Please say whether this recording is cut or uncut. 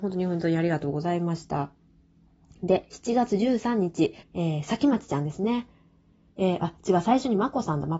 cut